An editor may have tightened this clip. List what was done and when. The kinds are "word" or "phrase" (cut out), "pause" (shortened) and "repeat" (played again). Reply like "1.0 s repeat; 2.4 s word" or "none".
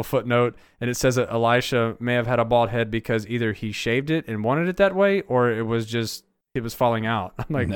6.4 s pause